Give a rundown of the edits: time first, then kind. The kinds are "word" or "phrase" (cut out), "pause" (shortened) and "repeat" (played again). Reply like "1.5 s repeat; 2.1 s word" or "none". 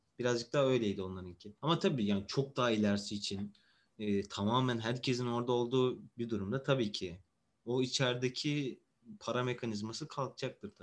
1.6 s pause; 7.5 s word